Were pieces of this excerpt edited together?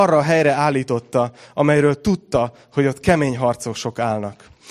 no; 0 cuts

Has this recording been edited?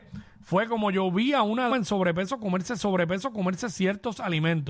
yes; 2 cuts; at 1.7 s, 2.8 s

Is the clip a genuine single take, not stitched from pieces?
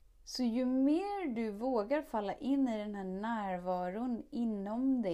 yes; 0 cuts

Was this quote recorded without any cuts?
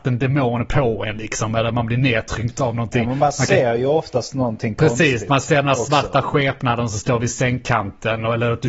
yes; 0 cuts

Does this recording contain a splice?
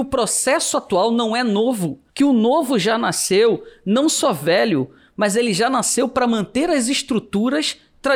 yes; 1 cut; at 2.1 s

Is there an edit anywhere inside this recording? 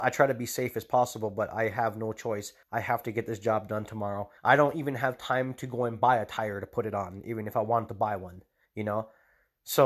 yes; 3 cuts; at 2.6 s, 4.4 s, 8.7 s

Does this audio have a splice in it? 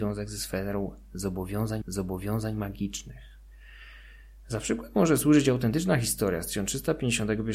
yes; 1 cut; at 1.8 s

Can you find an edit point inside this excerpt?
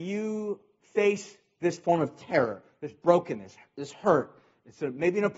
no; 0 cuts

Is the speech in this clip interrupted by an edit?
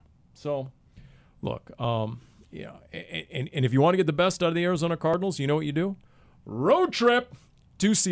no; 0 cuts

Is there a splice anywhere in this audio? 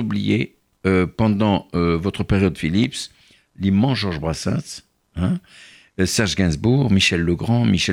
no; 0 cuts

